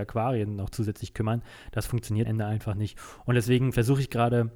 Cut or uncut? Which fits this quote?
cut